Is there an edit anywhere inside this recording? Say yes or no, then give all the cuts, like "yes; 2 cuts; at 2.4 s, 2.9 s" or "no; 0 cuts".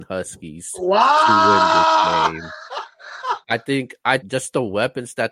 yes; 2 cuts; at 3.4 s, 4.2 s